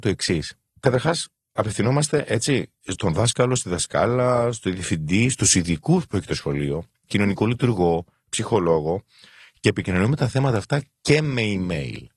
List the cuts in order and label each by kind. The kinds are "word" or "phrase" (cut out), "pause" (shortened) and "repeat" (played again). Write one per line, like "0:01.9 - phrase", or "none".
none